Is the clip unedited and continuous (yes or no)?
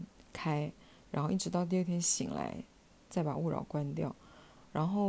yes